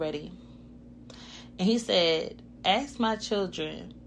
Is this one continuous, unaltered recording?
no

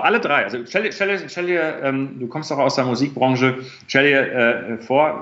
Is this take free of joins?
yes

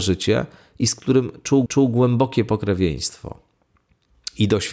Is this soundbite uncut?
no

